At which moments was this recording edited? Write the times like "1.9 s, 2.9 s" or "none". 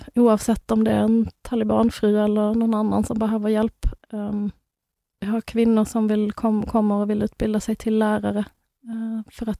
none